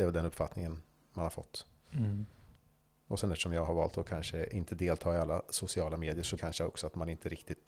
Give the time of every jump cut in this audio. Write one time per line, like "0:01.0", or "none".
0:06.4

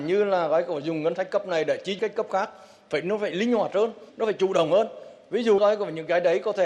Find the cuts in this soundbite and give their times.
0:02.0
0:04.1
0:05.6

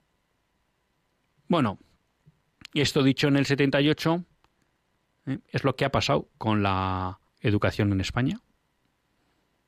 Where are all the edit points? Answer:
0:06.3
0:07.3

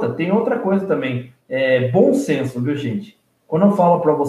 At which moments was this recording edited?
0:01.4

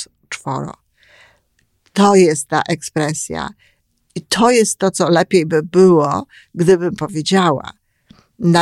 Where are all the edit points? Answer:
none

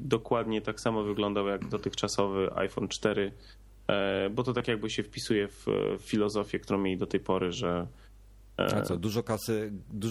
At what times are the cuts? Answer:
none

